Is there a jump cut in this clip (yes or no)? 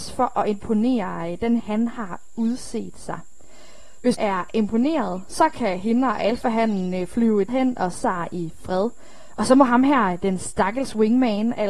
yes